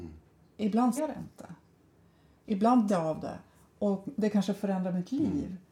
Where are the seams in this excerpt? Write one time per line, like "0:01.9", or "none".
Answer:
0:01.0
0:02.9